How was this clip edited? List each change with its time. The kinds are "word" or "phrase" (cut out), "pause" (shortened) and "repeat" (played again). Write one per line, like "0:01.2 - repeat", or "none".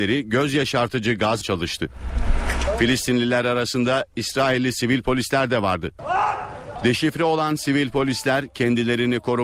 0:01.4 - phrase